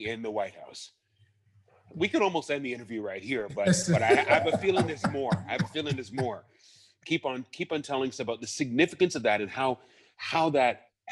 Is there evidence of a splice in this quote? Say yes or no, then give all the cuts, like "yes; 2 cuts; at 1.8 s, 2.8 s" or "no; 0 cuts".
no; 0 cuts